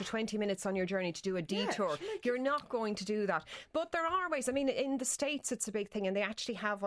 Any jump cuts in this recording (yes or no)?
no